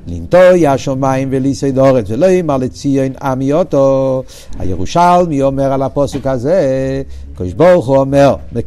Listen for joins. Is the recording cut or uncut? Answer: uncut